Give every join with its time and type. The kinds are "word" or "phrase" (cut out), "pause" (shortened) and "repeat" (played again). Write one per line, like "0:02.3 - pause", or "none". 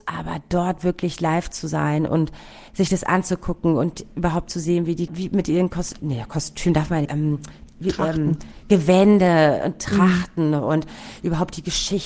0:02.7 - pause
0:05.1 - phrase
0:06.0 - word
0:07.0 - phrase

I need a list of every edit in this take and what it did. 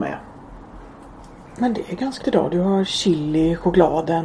0:02.2 - word

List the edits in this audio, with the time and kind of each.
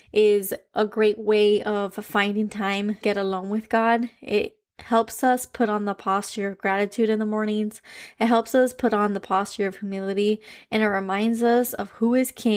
0:03.0 - word

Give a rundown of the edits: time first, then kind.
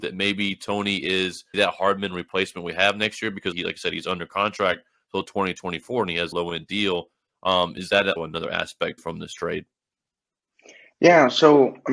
0:01.5 - word
0:03.5 - word
0:06.3 - word
0:08.2 - word
0:09.0 - word

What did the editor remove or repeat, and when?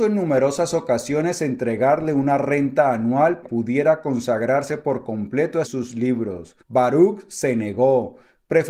0:03.4 - phrase
0:05.6 - word
0:06.6 - pause

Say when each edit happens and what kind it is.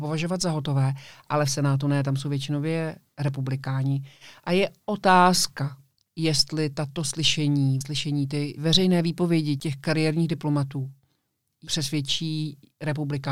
0:07.8 - word

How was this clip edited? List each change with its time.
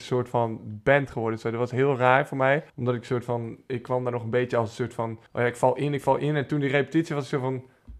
0:02.7 - pause
0:05.3 - pause

